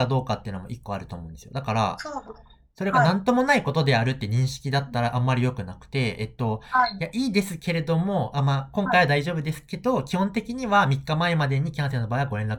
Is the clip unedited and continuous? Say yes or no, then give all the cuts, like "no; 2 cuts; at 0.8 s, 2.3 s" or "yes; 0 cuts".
yes; 0 cuts